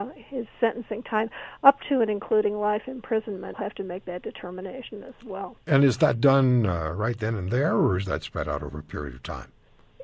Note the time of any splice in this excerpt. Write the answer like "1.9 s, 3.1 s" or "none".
3.5 s